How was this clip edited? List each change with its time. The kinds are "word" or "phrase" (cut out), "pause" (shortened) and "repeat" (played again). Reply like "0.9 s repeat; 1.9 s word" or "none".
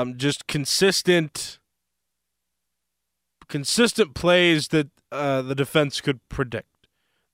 none